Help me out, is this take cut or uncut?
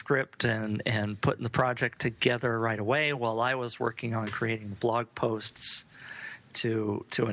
uncut